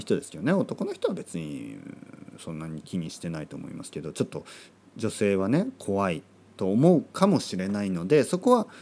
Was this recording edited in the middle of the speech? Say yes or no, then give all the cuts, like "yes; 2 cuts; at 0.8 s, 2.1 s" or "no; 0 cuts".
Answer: no; 0 cuts